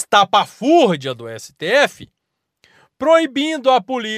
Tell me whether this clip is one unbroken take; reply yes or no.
yes